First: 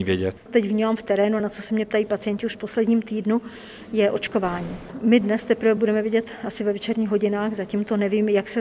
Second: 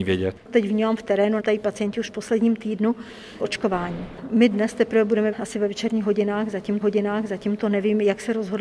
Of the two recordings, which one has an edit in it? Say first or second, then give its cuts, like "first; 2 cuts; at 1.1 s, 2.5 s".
second; 4 cuts; at 1.4 s, 3.4 s, 5.3 s, 6.8 s